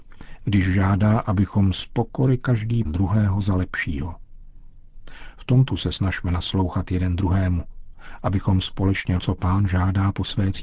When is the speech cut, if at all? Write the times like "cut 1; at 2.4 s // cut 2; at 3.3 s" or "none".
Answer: cut 1; at 2.8 s // cut 2; at 5.7 s // cut 3; at 9.2 s